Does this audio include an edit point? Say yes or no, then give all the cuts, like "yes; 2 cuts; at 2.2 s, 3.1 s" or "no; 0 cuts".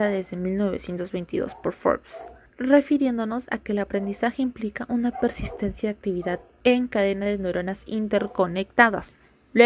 no; 0 cuts